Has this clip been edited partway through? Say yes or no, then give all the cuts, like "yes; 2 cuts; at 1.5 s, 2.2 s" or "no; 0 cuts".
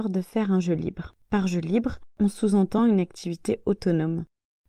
no; 0 cuts